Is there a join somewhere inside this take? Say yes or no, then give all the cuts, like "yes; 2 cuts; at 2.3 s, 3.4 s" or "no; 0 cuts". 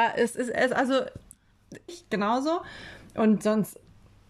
yes; 1 cut; at 1.9 s